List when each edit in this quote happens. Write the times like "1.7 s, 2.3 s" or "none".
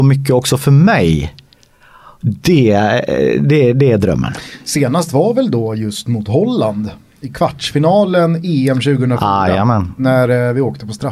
none